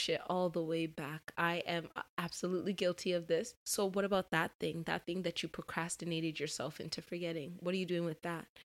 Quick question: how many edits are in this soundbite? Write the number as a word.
one